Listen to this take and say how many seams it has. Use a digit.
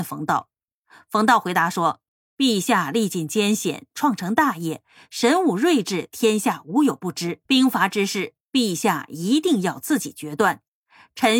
2